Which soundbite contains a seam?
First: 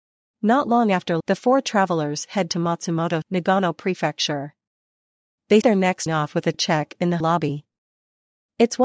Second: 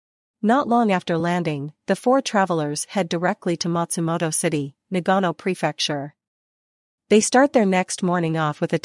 first; 7 cuts; at 1.2 s, 2.5 s, 3.2 s, 5.6 s, 6.1 s, 6.5 s, 7.2 s

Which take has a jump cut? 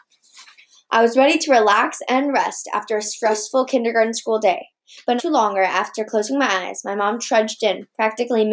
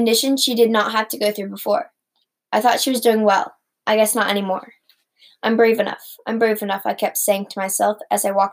first; 1 cut; at 5.2 s

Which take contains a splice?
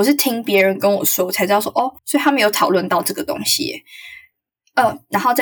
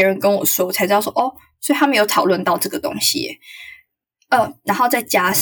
first; 1 cut; at 2.0 s

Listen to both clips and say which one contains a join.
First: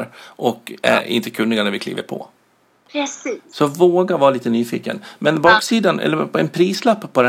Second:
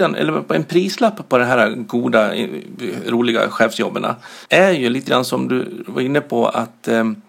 second; 1 cut; at 4.5 s

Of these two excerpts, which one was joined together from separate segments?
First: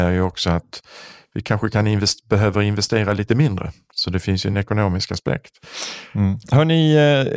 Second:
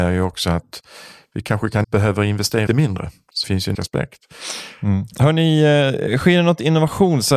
second; 4 cuts; at 1.8 s, 2.7 s, 3.4 s, 3.7 s

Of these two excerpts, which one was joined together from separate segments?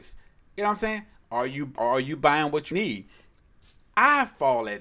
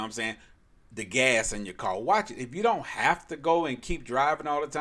first; 2 cuts; at 1.8 s, 2.7 s

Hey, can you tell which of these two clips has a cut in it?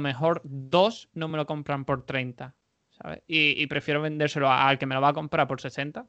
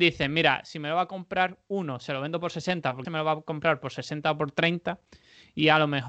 second; 1 cut; at 3.0 s

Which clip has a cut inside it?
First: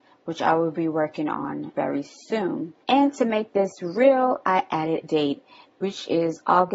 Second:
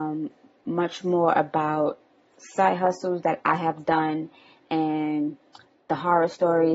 first; 3 cuts; at 1.8 s, 2.8 s, 5.0 s

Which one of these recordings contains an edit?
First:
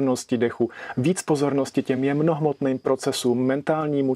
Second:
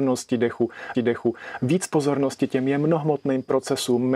second; 1 cut; at 0.9 s

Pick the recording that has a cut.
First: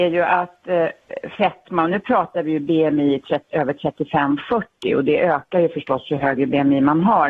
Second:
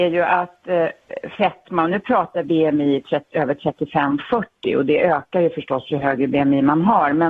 second; 1 cut; at 2.4 s

